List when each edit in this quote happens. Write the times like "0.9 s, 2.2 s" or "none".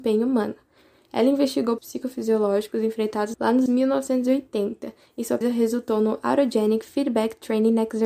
1.8 s, 3.3 s, 3.7 s, 5.4 s